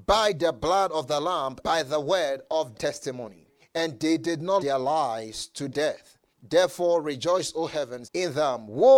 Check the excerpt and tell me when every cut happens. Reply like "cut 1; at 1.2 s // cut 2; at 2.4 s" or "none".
cut 1; at 1.6 s // cut 2; at 2.7 s // cut 3; at 3.6 s // cut 4; at 4.6 s // cut 5; at 5.7 s // cut 6; at 6.3 s // cut 7; at 8.0 s